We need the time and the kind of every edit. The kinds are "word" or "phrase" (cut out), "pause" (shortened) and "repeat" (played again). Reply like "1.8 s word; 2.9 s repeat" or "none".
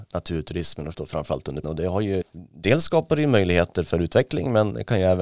0.9 s word; 1.6 s word; 2.2 s word